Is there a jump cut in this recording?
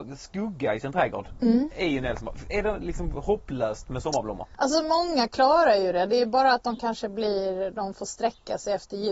no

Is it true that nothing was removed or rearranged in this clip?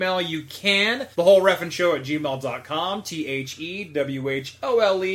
no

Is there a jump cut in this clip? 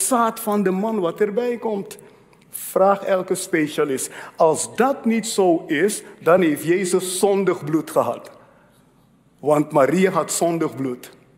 no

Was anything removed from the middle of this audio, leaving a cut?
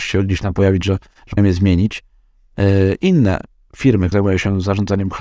yes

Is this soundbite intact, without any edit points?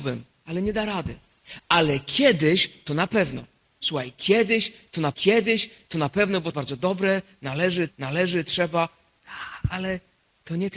no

